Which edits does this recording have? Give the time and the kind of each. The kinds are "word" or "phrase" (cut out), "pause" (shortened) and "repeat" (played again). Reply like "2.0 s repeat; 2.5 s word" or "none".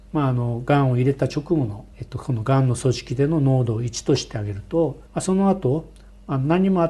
1.9 s pause; 5.1 s pause

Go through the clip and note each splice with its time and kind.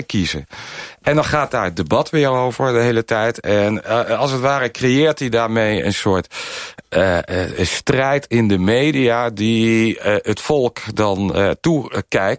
none

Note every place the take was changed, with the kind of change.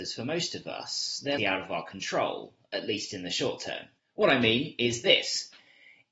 1.4 s word

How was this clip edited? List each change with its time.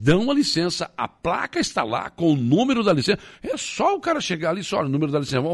none

